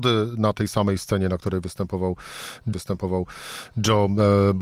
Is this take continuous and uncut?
no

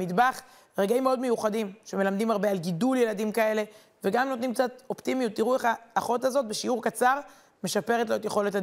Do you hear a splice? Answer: no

